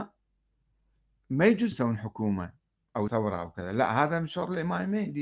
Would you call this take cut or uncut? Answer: cut